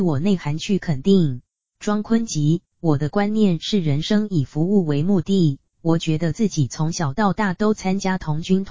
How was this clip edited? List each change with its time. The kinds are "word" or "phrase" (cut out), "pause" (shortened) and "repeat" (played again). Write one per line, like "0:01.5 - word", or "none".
0:01.5 - pause